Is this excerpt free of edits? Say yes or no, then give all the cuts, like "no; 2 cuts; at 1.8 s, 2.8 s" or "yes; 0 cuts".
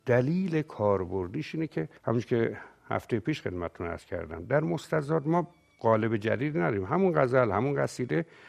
no; 1 cut; at 2.0 s